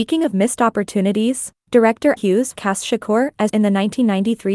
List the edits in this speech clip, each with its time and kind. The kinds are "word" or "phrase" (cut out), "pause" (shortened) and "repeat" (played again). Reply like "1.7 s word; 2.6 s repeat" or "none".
2.2 s word; 2.5 s word; 3.5 s word